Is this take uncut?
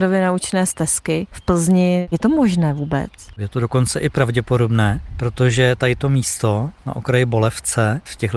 yes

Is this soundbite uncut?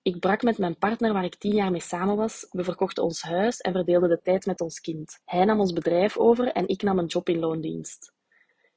no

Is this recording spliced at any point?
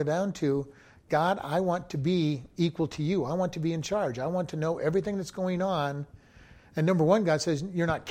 no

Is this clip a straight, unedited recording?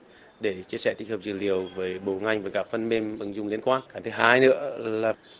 no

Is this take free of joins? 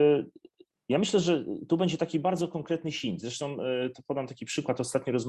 yes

